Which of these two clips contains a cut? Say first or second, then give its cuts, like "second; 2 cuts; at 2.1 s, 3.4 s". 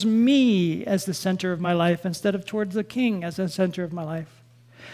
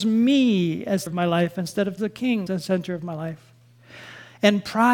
second; 3 cuts; at 1.1 s, 2.0 s, 2.5 s